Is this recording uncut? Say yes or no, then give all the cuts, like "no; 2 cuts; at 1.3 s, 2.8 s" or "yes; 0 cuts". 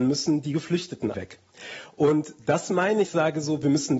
no; 2 cuts; at 1.1 s, 3.0 s